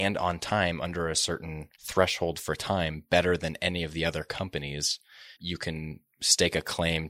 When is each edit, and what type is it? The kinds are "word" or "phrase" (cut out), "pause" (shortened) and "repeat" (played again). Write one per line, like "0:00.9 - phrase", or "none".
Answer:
0:01.8 - pause
0:05.4 - word